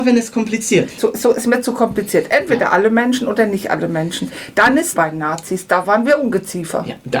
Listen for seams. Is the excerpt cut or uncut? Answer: cut